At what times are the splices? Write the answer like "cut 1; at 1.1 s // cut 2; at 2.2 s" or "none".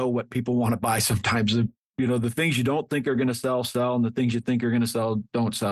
none